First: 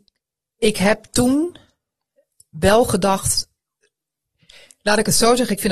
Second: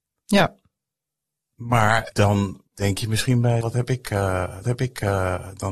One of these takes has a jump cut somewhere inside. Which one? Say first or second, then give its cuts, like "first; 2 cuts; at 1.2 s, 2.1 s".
second; 3 cuts; at 2.7 s, 3.6 s, 4.6 s